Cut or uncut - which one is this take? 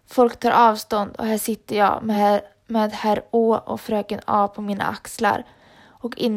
uncut